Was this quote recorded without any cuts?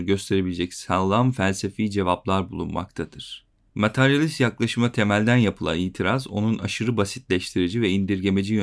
yes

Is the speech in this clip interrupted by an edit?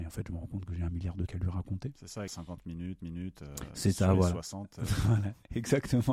yes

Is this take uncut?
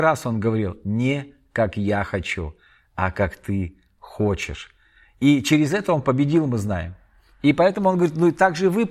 yes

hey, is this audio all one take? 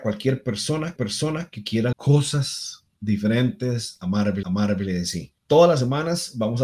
no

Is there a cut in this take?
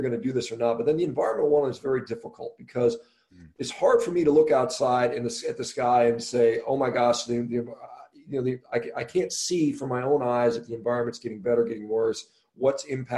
no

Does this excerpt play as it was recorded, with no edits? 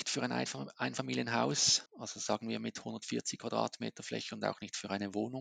no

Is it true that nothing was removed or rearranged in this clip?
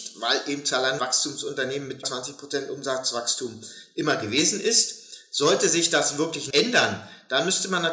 no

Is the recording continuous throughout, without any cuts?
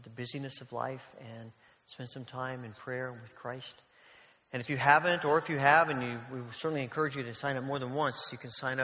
yes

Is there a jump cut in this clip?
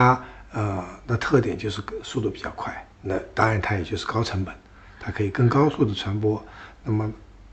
yes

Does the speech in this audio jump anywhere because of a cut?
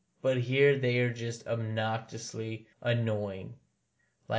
yes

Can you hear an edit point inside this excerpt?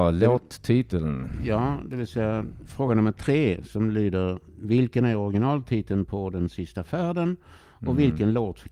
no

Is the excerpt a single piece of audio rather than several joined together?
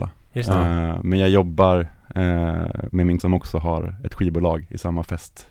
no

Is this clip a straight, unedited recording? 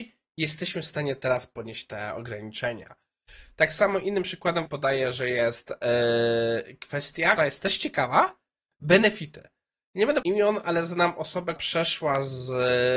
no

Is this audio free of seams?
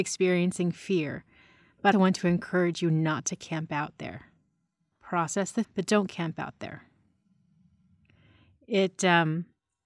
no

